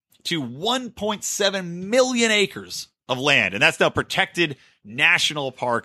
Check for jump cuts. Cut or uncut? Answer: uncut